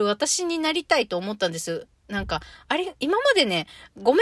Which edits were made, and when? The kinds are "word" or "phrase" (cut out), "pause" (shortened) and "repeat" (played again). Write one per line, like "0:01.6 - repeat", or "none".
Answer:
none